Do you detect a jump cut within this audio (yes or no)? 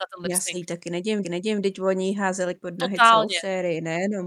yes